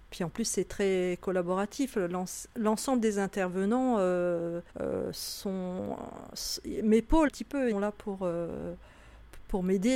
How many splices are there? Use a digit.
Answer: 3